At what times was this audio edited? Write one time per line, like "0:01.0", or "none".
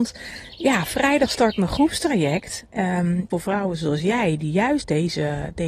0:03.3